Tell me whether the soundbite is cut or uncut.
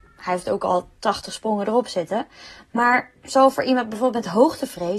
uncut